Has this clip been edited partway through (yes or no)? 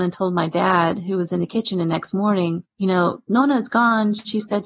yes